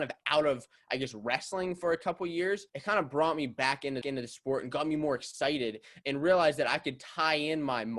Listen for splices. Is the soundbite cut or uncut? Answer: cut